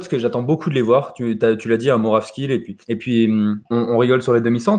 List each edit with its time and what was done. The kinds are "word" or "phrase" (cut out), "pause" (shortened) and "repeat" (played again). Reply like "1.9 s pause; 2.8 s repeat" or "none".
2.8 s pause; 3.6 s pause